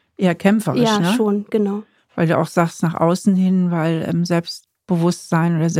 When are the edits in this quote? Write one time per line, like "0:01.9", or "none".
none